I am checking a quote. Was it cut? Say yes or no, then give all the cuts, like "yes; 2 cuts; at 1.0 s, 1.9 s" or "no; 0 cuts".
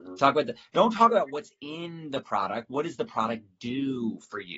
no; 0 cuts